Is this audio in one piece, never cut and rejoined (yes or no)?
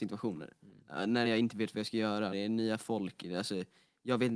no